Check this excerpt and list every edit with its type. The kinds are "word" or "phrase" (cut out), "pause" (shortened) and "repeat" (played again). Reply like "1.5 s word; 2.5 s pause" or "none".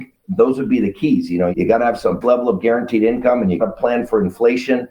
1.5 s word; 2.2 s word; 3.6 s word